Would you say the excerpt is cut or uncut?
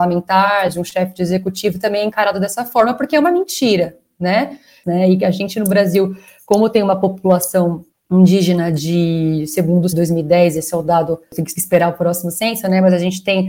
cut